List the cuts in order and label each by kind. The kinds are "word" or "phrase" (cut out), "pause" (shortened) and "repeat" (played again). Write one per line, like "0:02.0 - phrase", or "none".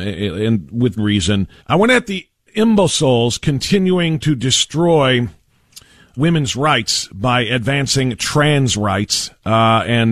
0:01.0 - word
0:01.6 - pause
0:06.2 - word